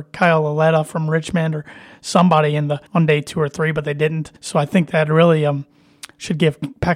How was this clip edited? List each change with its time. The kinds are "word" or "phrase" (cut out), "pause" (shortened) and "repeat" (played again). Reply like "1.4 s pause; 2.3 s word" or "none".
2.9 s pause; 4.4 s pause

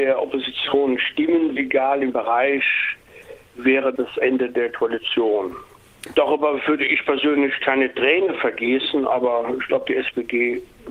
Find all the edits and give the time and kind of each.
1.6 s word; 2.1 s word; 4.0 s word

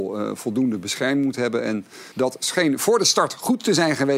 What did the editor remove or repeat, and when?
2.1 s pause

